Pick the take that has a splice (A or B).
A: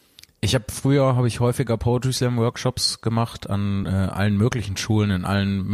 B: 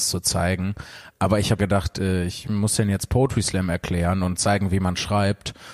B